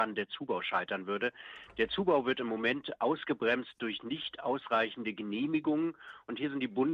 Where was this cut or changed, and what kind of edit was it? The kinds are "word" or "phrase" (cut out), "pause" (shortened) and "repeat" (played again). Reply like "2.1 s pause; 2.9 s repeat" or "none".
none

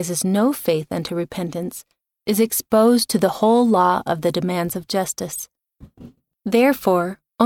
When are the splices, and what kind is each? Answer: none

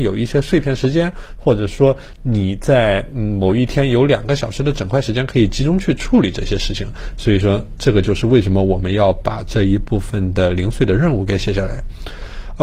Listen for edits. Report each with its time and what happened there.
none

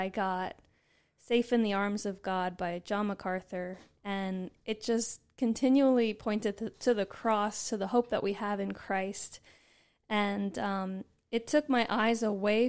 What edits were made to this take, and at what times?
none

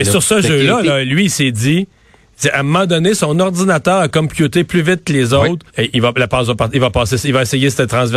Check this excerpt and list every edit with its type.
5.7 s pause

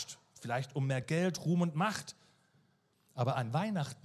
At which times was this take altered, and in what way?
none

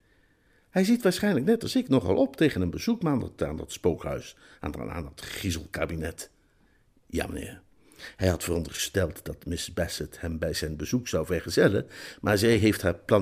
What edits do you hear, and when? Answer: none

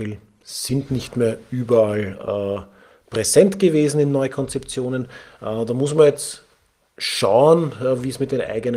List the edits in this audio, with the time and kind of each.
none

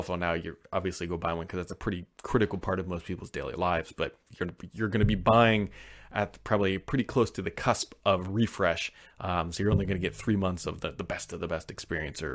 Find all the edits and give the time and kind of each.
none

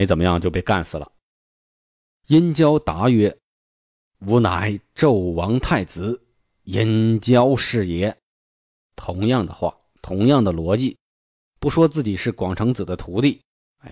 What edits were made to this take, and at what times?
none

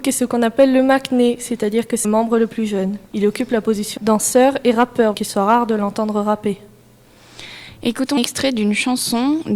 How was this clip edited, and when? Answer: 2.0 s word; 3.1 s pause; 4.0 s phrase; 5.1 s word; 8.2 s word

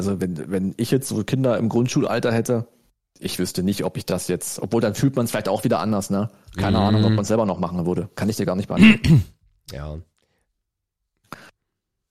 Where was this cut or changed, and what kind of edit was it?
none

